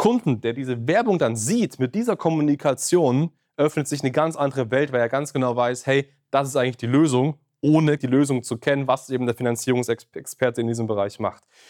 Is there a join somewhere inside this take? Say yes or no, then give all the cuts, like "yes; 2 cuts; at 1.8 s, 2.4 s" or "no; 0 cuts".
yes; 1 cut; at 8.0 s